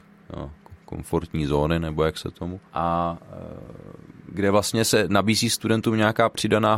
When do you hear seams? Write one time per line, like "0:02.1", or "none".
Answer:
0:02.7